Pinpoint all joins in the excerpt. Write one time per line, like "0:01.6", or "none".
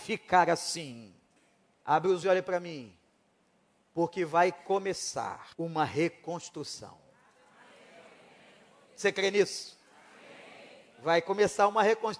0:01.4
0:02.2
0:05.5